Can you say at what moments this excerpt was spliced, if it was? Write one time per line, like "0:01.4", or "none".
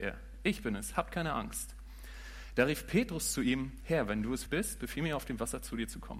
0:04.5